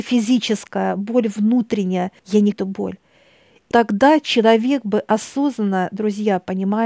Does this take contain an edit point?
yes; 3 cuts; at 2.2 s, 2.5 s, 3.7 s

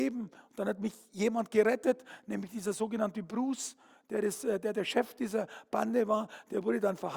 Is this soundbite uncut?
yes; 0 cuts

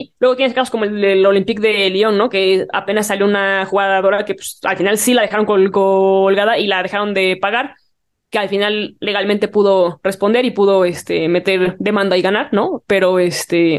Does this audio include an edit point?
no; 0 cuts

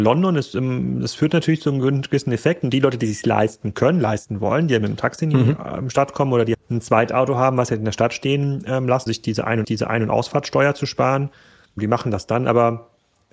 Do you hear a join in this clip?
yes; 3 cuts; at 6.5 s, 9.1 s, 9.6 s

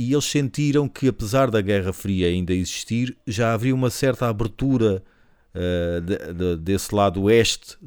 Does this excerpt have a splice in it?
no; 0 cuts

